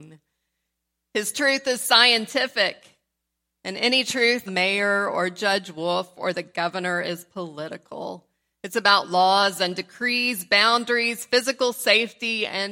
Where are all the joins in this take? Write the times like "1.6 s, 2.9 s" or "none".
4.5 s